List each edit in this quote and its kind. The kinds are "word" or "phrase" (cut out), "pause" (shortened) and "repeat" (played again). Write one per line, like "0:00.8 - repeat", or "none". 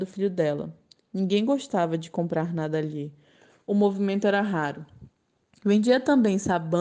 none